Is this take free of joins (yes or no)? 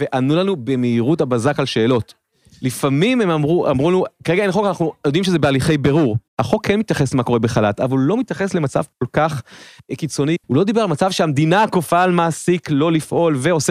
no